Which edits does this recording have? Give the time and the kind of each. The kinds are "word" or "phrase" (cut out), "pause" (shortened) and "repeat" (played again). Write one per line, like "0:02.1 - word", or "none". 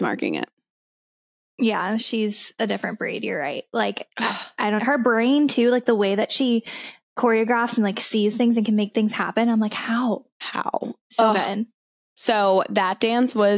0:04.8 - word